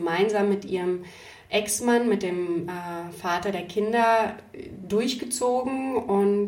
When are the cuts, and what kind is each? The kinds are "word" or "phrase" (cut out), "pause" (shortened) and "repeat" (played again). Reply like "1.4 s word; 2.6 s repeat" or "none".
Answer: none

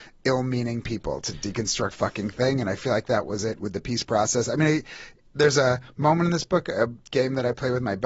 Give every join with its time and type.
1.9 s phrase

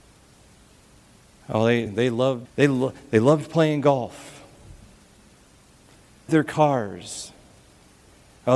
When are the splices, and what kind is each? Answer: 1.9 s word; 2.4 s word; 6.3 s word

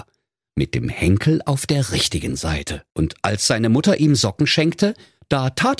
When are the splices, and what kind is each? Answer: 2.9 s pause

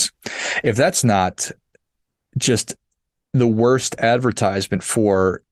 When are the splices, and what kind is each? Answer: none

